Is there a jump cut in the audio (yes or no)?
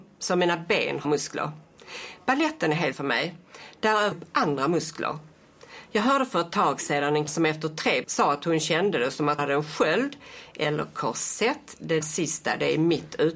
yes